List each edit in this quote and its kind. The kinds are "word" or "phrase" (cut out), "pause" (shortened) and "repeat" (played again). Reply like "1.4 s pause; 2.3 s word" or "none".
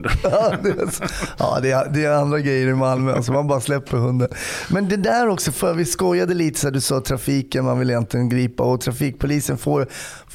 5.6 s word